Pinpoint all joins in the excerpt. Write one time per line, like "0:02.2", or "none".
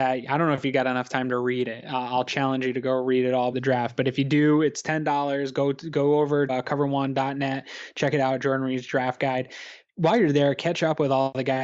0:03.5
0:06.5